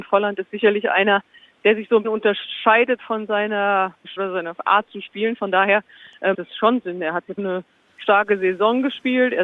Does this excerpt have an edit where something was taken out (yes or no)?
yes